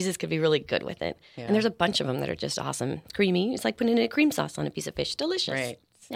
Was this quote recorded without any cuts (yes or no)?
yes